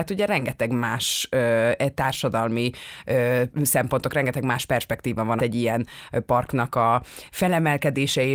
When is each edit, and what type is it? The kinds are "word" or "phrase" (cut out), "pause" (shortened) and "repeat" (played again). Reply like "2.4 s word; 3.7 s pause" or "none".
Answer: 5.4 s word